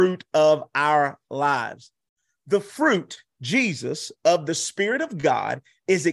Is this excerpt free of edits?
yes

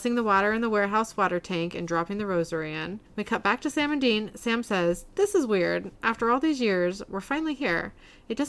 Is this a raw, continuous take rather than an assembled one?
no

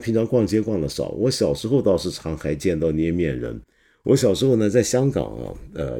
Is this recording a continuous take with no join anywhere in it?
yes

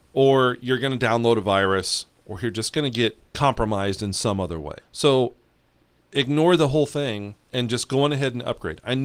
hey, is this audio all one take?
no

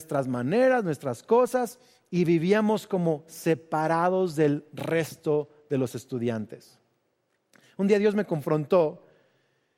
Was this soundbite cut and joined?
no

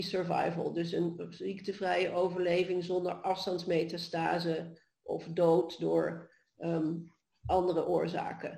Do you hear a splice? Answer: no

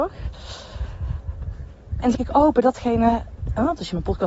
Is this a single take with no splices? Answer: no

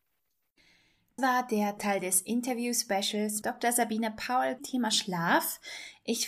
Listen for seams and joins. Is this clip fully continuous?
no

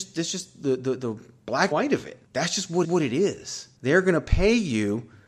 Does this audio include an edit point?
yes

